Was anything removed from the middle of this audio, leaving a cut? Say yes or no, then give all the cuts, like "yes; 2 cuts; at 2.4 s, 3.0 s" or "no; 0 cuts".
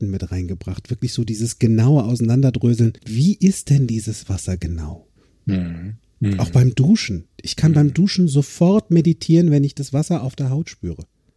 yes; 2 cuts; at 3.0 s, 5.2 s